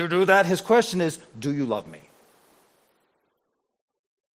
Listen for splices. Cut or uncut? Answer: uncut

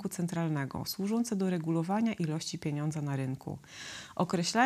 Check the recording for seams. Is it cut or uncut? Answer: uncut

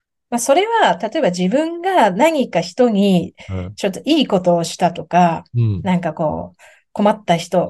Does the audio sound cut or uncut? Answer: uncut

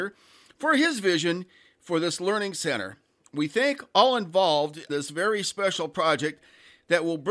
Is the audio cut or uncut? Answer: cut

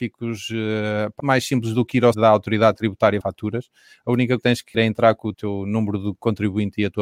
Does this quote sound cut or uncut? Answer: cut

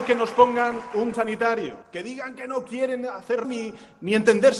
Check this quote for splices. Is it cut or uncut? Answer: cut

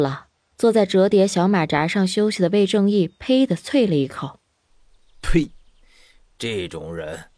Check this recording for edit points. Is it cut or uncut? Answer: uncut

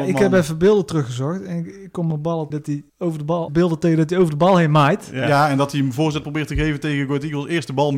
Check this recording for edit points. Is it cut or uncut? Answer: cut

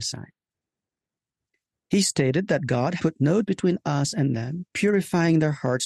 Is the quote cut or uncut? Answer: cut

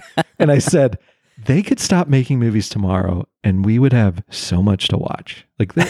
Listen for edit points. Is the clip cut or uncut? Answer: uncut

